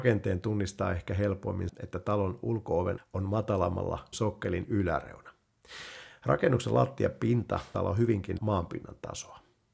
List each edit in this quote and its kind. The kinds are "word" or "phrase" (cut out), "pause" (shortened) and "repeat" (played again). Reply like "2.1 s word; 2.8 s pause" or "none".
1.7 s word; 3.0 s word; 4.1 s word; 7.7 s word; 8.4 s word